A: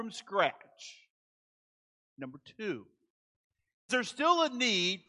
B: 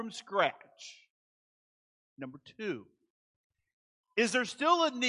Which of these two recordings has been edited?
A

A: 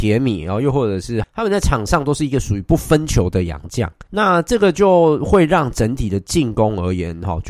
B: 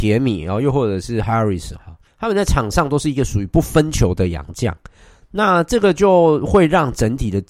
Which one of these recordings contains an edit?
A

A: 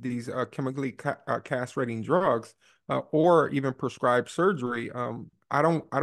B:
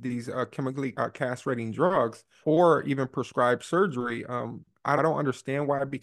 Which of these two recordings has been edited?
B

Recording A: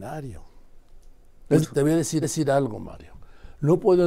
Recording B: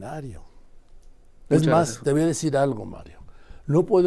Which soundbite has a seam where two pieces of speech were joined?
A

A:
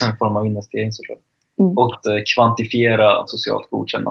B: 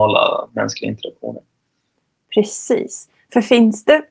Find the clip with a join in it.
A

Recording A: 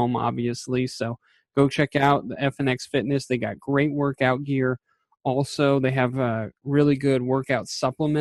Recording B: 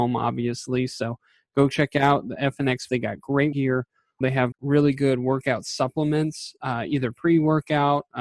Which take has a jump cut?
B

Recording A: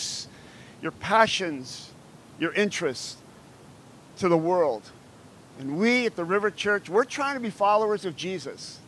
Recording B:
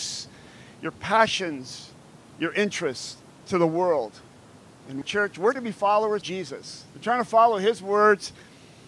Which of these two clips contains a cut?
B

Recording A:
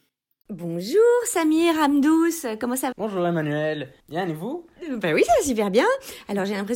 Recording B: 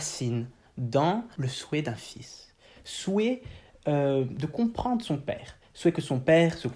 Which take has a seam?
A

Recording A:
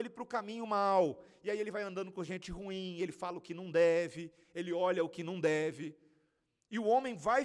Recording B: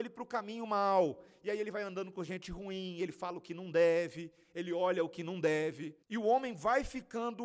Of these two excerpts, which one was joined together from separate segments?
B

